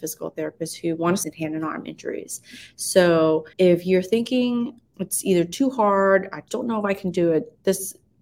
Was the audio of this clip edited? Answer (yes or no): yes